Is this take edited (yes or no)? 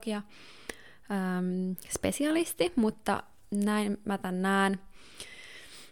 no